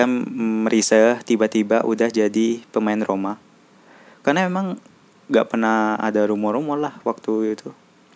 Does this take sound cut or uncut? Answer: uncut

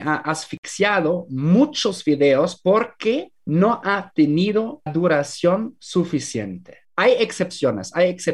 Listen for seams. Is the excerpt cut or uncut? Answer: cut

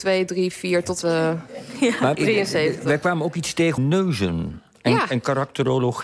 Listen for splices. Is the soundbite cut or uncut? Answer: cut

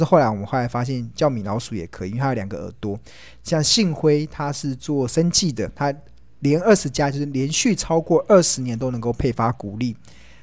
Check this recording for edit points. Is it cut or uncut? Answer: uncut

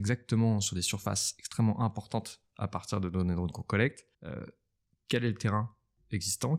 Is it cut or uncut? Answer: cut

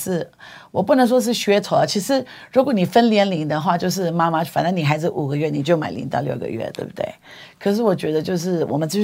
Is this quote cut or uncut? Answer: uncut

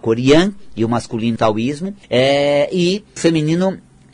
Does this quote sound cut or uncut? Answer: cut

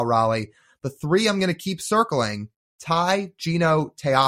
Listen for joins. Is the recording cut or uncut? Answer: uncut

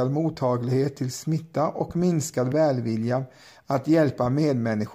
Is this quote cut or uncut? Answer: uncut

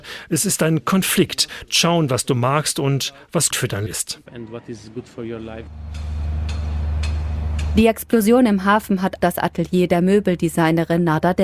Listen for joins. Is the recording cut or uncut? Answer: cut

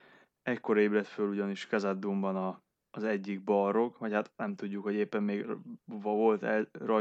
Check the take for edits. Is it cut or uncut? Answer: uncut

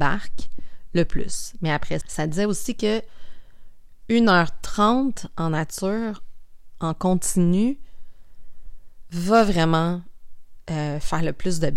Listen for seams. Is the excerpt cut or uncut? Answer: cut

